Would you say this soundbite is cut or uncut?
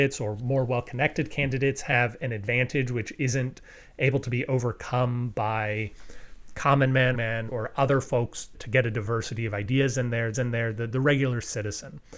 cut